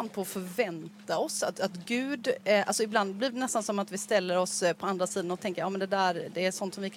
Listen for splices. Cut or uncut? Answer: uncut